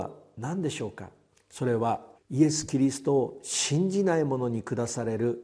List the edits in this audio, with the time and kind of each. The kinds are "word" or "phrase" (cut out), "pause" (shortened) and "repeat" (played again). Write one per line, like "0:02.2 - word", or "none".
0:02.2 - pause